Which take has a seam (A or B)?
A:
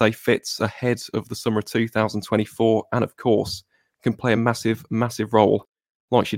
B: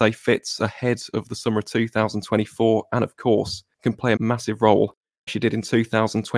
B